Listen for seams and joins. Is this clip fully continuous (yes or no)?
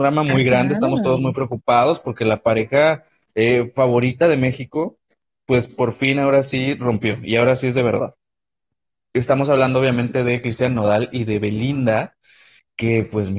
yes